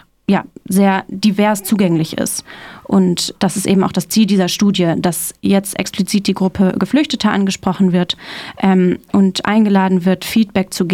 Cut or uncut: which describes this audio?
uncut